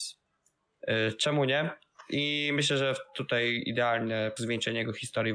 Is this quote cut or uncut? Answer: cut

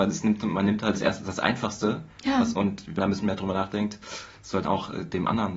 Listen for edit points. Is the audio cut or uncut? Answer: cut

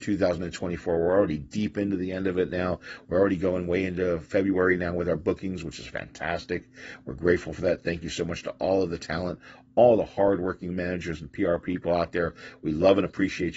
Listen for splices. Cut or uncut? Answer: uncut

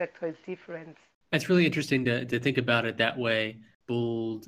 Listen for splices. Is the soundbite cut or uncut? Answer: uncut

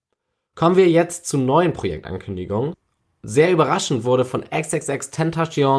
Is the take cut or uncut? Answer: uncut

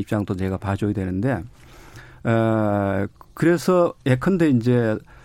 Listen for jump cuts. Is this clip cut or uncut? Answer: uncut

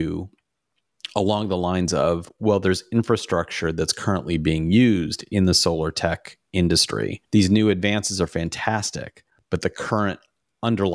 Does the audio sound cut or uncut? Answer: cut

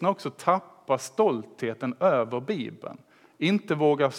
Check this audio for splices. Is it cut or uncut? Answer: uncut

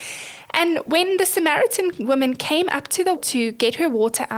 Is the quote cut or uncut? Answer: cut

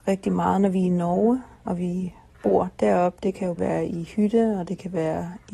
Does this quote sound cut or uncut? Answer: cut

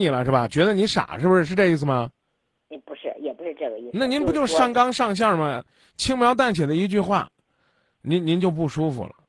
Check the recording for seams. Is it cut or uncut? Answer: uncut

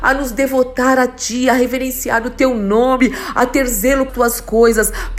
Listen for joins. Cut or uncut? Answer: cut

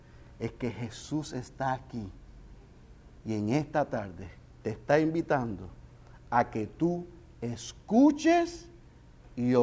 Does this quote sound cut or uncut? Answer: uncut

